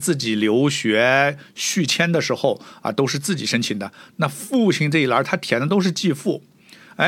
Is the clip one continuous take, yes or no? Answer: yes